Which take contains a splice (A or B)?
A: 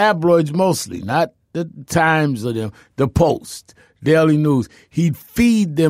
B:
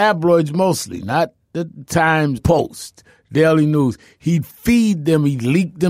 B